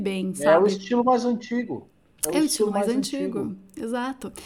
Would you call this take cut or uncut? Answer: uncut